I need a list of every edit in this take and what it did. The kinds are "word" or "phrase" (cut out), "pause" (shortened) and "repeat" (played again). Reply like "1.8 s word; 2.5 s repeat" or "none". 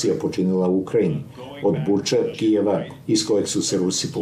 2.3 s word